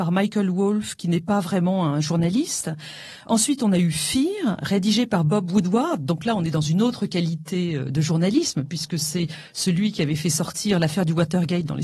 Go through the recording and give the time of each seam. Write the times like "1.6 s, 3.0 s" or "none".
none